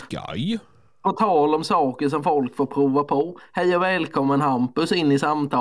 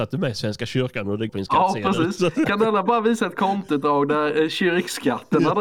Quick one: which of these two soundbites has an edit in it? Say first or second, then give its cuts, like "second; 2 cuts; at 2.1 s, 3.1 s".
second; 1 cut; at 1.3 s